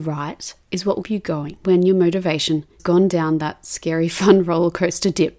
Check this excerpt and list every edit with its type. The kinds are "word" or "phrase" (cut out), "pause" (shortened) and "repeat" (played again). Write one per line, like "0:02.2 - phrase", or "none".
0:01.0 - word
0:01.6 - word
0:02.8 - word